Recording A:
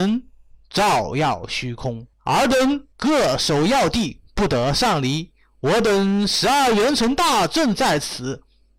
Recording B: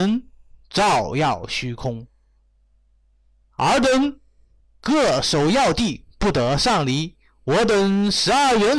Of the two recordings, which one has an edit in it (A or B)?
A